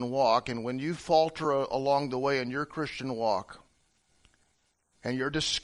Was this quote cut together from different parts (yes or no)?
no